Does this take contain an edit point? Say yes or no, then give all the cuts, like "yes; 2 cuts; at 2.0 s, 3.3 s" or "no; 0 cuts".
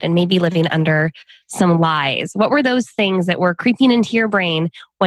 no; 0 cuts